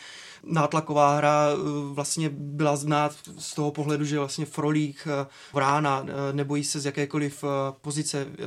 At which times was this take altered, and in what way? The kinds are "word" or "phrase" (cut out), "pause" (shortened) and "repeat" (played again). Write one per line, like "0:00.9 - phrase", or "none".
0:05.5 - word